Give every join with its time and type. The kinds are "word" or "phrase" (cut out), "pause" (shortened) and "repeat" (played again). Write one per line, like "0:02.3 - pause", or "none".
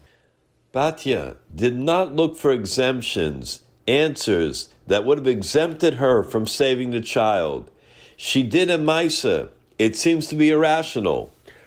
none